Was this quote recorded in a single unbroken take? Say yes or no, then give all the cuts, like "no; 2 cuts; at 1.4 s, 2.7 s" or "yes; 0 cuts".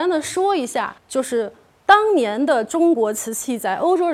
no; 1 cut; at 1.0 s